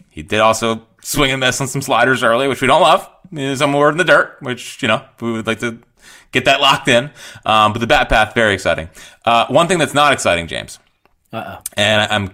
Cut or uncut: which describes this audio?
uncut